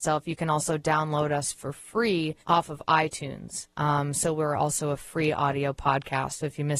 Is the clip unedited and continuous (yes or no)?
no